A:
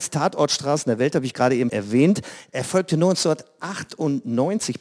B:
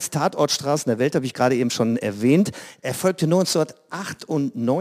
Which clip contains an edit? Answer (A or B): A